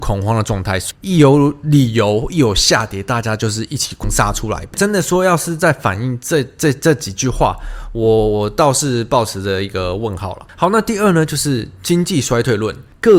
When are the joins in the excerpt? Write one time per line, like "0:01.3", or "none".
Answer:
none